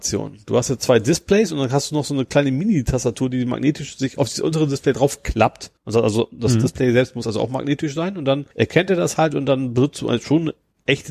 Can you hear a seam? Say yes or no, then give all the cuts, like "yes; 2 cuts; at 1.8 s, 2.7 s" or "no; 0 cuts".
yes; 2 cuts; at 5.8 s, 8.5 s